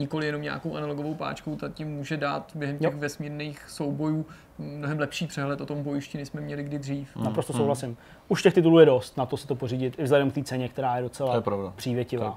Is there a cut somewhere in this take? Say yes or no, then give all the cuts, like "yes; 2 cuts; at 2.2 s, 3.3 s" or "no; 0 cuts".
no; 0 cuts